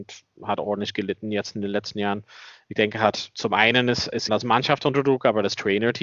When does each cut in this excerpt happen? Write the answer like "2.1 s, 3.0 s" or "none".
4.3 s